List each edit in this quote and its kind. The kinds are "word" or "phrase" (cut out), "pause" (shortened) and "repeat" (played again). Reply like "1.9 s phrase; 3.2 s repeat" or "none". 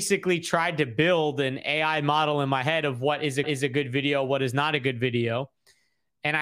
3.4 s repeat